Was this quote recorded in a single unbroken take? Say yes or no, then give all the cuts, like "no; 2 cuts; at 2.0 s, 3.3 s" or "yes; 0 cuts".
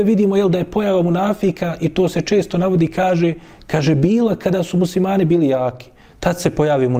yes; 0 cuts